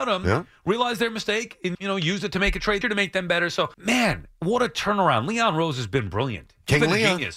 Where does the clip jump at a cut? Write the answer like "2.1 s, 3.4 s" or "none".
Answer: 1.7 s, 2.8 s, 3.7 s